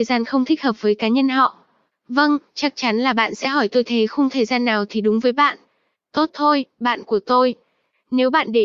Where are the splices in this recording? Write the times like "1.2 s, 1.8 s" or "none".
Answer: none